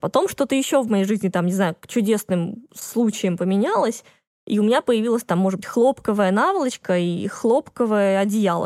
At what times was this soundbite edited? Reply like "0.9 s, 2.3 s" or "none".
none